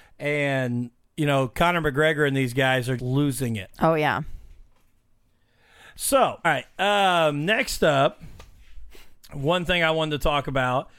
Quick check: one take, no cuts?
no; 2 cuts; at 3.0 s, 6.4 s

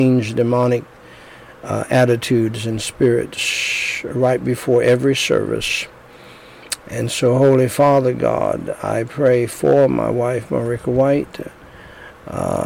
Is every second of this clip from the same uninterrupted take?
yes; 0 cuts

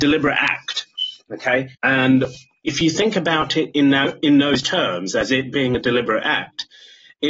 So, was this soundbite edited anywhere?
yes; 1 cut; at 1.7 s

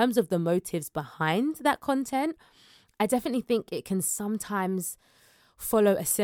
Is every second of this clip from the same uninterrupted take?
yes; 0 cuts

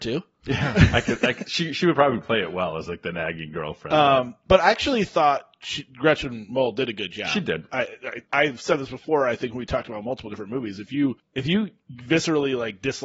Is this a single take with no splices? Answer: no; 1 cut; at 8.2 s

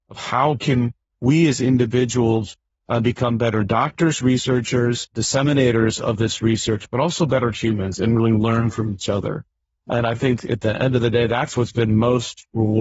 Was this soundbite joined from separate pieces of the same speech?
no; 0 cuts

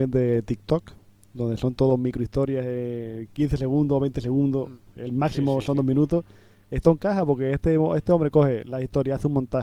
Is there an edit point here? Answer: no; 0 cuts

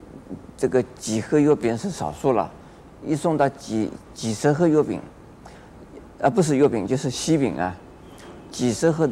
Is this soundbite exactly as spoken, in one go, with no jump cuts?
yes; 0 cuts

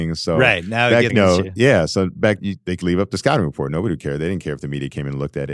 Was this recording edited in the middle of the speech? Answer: yes; 3 cuts; at 1.1 s, 2.4 s, 2.8 s

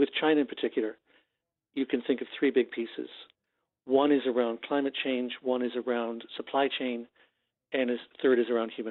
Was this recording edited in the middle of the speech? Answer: no; 0 cuts

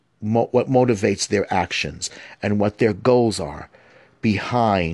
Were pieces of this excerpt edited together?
no; 0 cuts

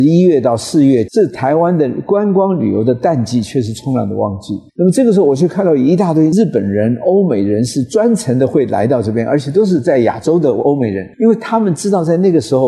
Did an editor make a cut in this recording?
yes; 2 cuts; at 4.7 s, 11.1 s

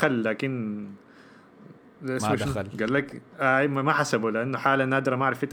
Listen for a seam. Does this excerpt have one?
yes; 1 cut; at 1.8 s

